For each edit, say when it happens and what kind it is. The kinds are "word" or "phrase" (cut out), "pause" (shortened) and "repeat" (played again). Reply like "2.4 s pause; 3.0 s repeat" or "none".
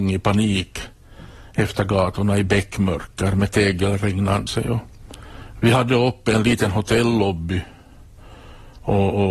4.5 s word